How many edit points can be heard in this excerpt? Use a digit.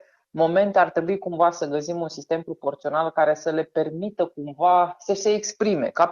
0